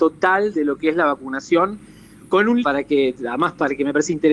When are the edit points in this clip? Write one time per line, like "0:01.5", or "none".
0:02.6